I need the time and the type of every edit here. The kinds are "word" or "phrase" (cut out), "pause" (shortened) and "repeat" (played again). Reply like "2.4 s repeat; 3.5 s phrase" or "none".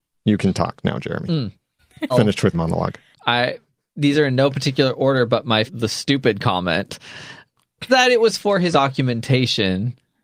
1.8 s pause; 2.1 s word; 2.5 s word; 3.1 s pause; 5.7 s phrase; 7.9 s word; 8.7 s word